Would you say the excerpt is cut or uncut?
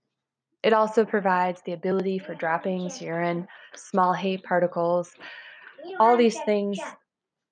uncut